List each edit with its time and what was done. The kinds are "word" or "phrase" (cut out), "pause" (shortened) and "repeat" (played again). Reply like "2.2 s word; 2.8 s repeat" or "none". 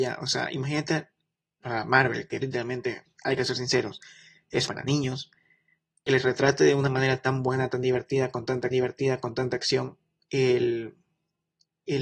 1.6 s word; 2.4 s word; 4.7 s phrase; 8.7 s repeat